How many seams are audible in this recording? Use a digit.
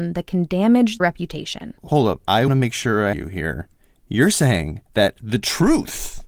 6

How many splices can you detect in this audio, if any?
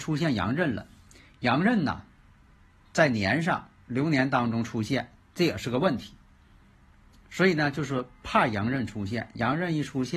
0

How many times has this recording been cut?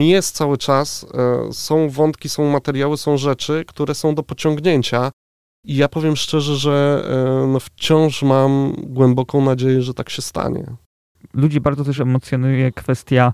0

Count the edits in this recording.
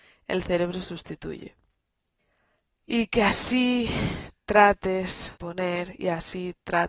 2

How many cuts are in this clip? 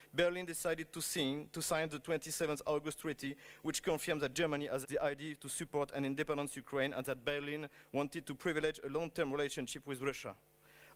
1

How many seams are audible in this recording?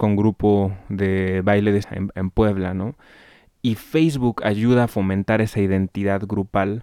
1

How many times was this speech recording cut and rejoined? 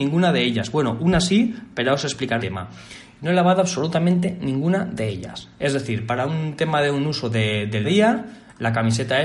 2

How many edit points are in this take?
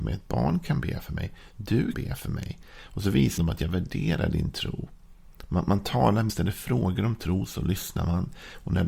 3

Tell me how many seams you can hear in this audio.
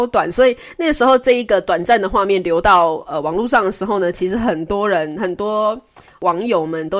0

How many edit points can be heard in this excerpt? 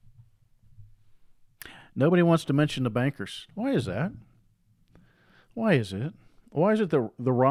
0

